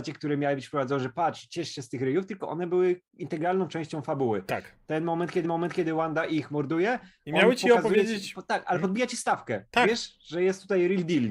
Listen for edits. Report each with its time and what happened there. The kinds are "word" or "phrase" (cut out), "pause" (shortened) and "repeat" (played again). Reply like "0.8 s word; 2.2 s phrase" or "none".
3.1 s pause; 5.4 s repeat